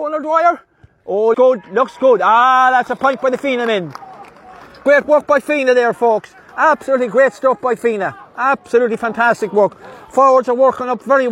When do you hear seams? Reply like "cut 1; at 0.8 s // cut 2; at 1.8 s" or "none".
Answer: cut 1; at 1.3 s // cut 2; at 3.0 s